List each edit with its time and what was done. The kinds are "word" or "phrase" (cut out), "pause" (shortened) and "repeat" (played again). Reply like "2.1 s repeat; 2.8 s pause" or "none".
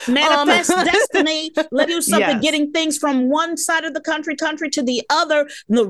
1.9 s phrase; 4.4 s repeat